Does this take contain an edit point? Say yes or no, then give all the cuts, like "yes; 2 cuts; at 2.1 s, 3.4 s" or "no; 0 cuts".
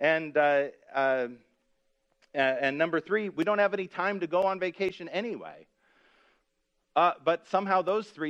no; 0 cuts